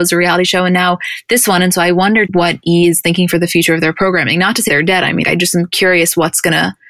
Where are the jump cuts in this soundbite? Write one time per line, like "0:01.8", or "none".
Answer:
0:02.3
0:04.7
0:05.2